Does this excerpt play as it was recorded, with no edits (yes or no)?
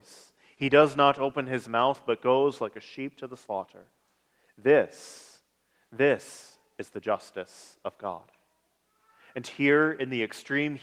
yes